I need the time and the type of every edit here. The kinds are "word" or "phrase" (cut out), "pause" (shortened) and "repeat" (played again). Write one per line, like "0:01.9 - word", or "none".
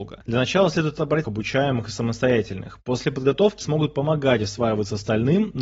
0:01.2 - word
0:03.6 - word